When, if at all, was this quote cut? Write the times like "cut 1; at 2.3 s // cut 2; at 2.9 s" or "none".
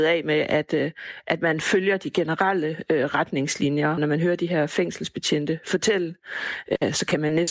cut 1; at 4.0 s